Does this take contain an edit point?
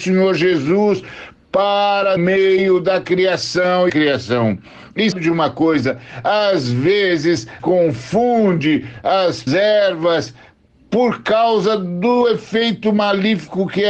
yes; 5 cuts; at 2.2 s, 3.9 s, 5.1 s, 7.6 s, 9.5 s

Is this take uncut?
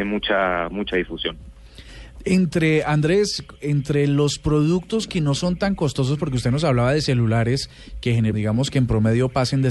no; 1 cut; at 8.3 s

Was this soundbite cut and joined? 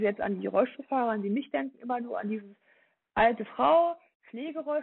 no; 0 cuts

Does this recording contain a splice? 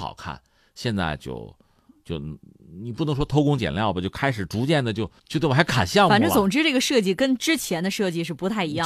yes; 1 cut; at 5.2 s

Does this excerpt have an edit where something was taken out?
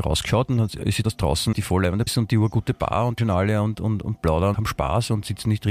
yes; 6 cuts; at 1.0 s, 1.5 s, 2.1 s, 3.2 s, 3.7 s, 4.5 s

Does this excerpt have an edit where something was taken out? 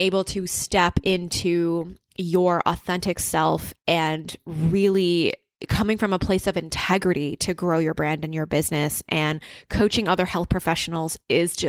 no; 0 cuts

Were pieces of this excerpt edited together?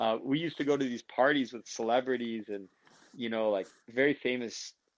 no; 0 cuts

